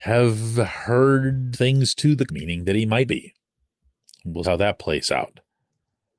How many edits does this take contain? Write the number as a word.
four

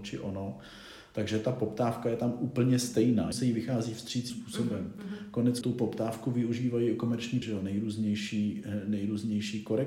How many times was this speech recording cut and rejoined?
four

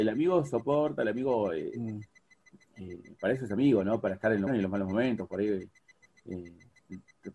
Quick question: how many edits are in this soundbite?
one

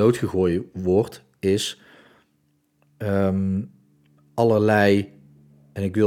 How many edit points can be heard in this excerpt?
zero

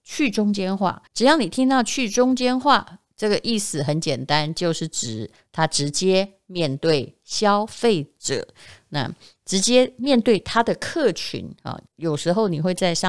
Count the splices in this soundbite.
two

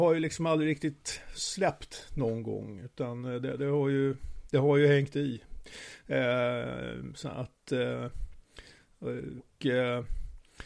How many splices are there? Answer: one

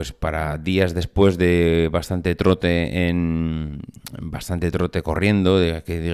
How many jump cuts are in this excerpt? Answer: zero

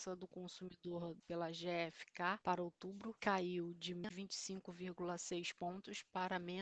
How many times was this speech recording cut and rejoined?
two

